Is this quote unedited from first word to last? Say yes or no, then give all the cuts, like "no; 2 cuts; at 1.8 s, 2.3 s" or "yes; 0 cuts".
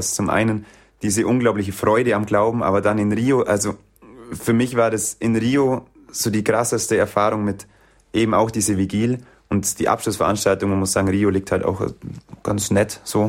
yes; 0 cuts